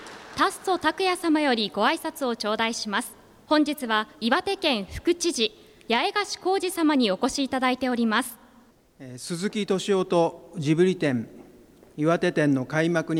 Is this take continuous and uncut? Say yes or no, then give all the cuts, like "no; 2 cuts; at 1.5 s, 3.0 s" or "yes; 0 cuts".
no; 1 cut; at 4.1 s